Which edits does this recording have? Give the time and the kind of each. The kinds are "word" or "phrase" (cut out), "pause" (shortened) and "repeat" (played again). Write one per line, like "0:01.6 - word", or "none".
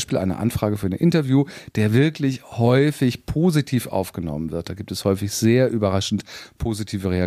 none